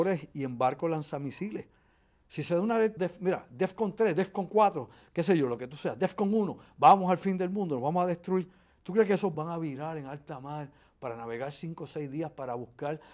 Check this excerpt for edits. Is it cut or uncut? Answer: cut